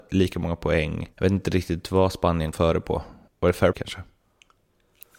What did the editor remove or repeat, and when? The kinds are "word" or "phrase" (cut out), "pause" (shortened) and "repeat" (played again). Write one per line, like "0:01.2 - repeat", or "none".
0:01.1 - pause
0:02.5 - word
0:03.3 - pause
0:03.7 - word